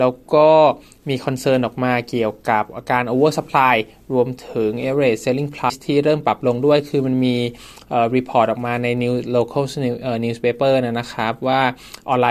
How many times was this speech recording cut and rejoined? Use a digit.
1